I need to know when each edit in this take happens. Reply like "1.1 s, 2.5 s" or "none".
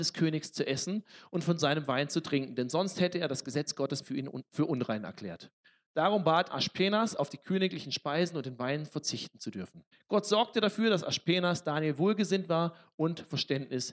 4.0 s, 5.6 s, 6.5 s, 9.9 s